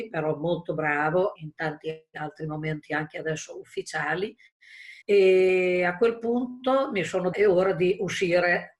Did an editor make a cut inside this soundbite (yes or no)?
yes